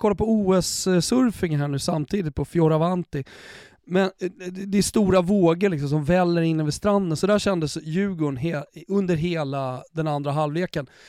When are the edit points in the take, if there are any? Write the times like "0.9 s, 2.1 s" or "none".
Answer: none